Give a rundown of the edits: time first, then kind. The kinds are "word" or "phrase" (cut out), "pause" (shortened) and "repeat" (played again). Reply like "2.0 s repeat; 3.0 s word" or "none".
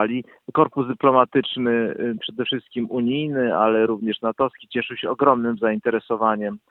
none